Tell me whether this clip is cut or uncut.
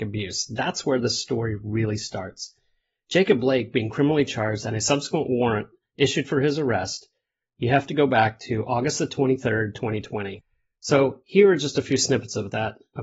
uncut